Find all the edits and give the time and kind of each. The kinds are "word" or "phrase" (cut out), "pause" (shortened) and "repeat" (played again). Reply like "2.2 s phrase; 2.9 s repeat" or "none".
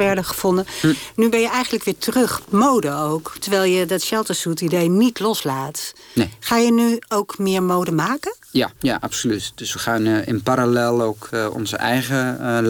2.4 s word; 8.8 s pause